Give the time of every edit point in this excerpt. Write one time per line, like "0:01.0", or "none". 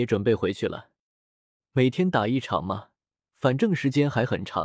none